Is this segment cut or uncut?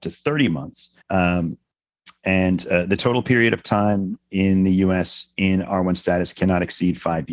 cut